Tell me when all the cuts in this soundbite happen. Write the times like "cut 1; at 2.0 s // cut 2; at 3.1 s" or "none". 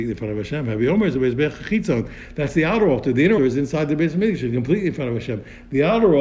cut 1; at 3.4 s